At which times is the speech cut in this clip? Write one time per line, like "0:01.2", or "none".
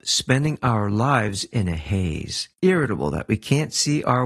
0:02.5